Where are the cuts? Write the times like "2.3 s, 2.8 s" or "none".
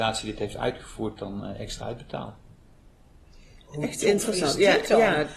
1.2 s, 1.8 s

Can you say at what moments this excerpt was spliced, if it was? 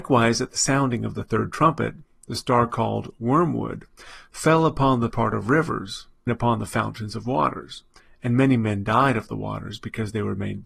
5.1 s, 6.3 s

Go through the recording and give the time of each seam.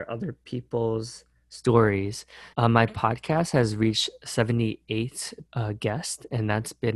2.5 s, 5.5 s

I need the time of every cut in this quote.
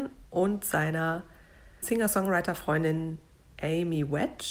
1.8 s

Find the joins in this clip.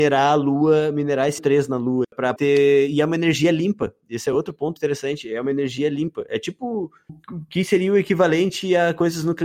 1.4 s, 2.0 s, 2.4 s, 4.8 s, 7.1 s

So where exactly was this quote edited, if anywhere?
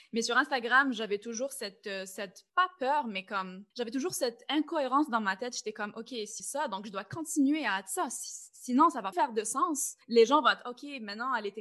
2.5 s, 3.7 s, 6.4 s, 9.1 s, 10.0 s

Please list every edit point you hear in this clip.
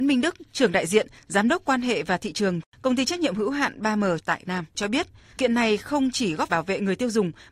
4.4 s, 5.4 s, 6.5 s

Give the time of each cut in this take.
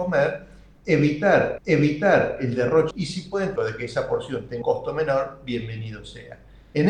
1.6 s, 2.9 s, 3.6 s, 4.6 s

